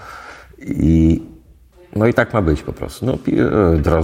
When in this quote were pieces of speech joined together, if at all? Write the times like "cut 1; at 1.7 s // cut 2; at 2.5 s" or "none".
cut 1; at 1.7 s